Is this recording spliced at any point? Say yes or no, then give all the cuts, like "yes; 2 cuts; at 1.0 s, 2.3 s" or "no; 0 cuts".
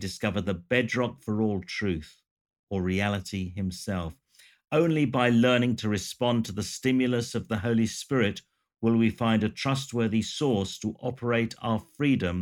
no; 0 cuts